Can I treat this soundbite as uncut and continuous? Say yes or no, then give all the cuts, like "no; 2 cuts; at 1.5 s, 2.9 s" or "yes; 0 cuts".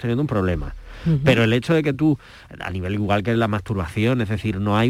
yes; 0 cuts